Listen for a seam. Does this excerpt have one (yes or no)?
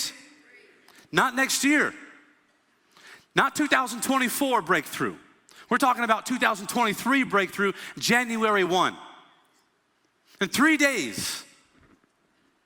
no